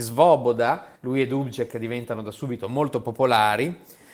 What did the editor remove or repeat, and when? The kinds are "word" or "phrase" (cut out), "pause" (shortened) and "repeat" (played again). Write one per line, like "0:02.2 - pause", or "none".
0:01.0 - pause